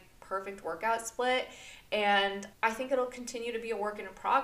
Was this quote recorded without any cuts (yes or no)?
no